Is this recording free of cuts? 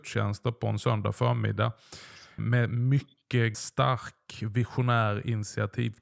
no; 2 cuts; at 2.4 s, 3.5 s

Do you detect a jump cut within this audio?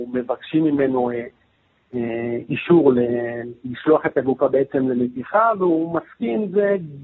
no; 0 cuts

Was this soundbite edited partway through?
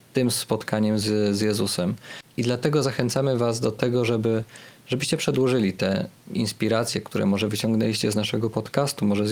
no; 0 cuts

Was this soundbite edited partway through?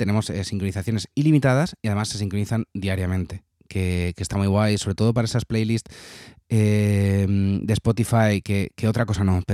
no; 0 cuts

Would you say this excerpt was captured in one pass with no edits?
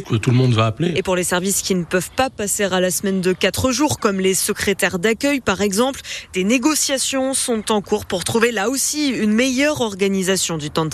yes; 0 cuts

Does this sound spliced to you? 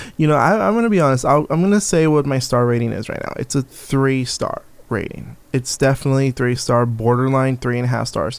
no; 0 cuts

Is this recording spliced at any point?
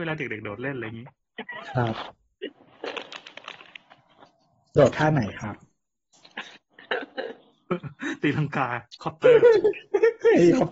no; 0 cuts

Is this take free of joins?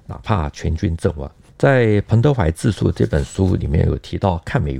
yes; 0 cuts

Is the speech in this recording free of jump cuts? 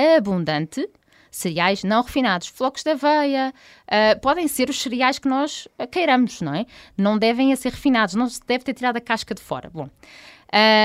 yes; 0 cuts

